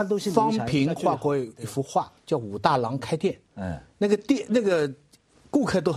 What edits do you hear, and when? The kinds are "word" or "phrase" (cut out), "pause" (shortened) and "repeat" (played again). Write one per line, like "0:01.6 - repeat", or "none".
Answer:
0:02.2 - pause
0:03.4 - pause